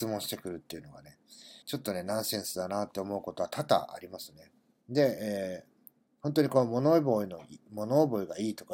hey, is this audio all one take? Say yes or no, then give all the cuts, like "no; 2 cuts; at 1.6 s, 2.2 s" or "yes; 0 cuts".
no; 1 cut; at 1.6 s